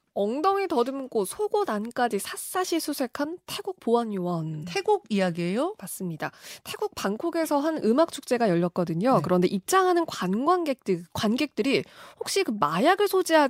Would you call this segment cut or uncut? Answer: uncut